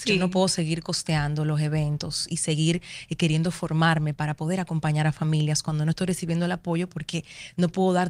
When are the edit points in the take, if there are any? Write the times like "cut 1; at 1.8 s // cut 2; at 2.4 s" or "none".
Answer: none